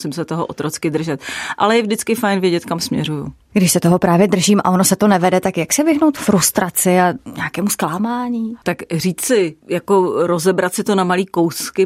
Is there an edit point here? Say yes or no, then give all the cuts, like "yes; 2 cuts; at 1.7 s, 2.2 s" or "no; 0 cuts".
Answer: yes; 1 cut; at 8.6 s